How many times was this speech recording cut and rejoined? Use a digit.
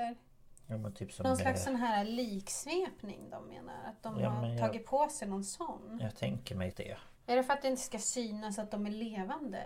2